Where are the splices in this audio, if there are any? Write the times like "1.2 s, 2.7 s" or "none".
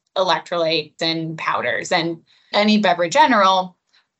1.0 s, 2.5 s, 3.1 s